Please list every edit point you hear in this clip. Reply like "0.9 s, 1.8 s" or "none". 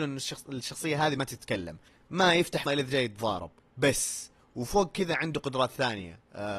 1.9 s, 2.7 s, 3.6 s